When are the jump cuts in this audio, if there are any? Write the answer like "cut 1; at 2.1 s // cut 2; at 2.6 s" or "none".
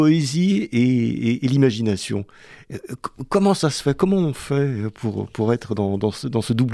none